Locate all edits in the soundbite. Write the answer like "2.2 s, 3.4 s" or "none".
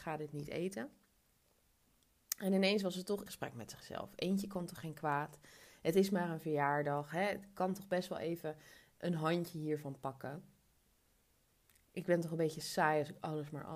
3.3 s